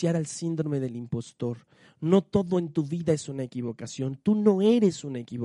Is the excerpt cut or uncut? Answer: uncut